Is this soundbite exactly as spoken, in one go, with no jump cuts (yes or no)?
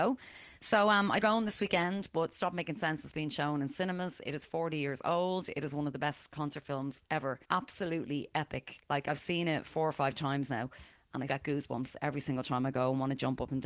no